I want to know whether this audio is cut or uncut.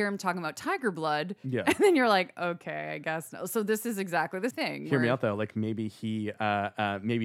cut